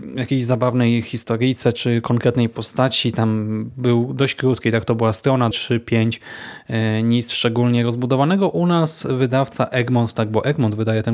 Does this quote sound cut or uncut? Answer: cut